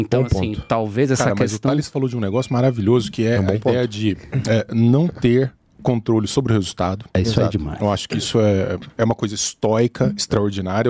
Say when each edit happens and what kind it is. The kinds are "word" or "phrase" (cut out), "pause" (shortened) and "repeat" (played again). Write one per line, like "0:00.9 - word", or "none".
none

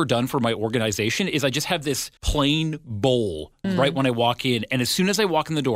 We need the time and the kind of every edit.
0:02.2 - pause
0:03.6 - word

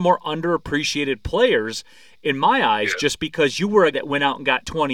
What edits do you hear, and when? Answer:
0:03.9 - word

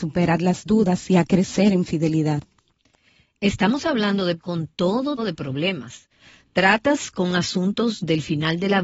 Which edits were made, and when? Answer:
0:04.4 - word
0:05.2 - word

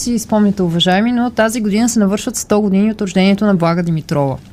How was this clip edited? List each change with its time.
none

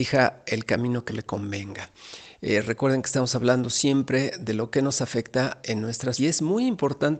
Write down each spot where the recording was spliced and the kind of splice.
0:01.1 - word
0:06.2 - word

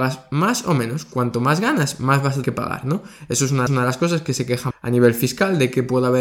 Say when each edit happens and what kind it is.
0:02.4 - word
0:03.7 - repeat
0:04.7 - word

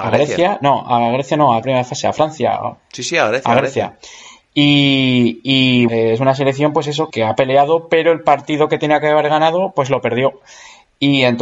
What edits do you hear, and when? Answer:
0:01.6 - phrase
0:05.9 - word
0:07.1 - word

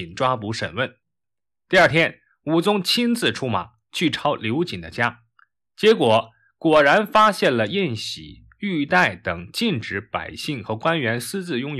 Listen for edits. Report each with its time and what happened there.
none

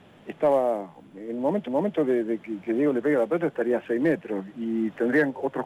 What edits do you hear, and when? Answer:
0:01.7 - repeat

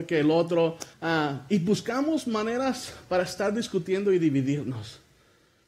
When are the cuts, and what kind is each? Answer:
0:00.9 - pause

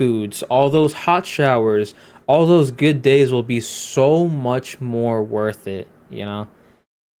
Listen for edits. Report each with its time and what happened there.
none

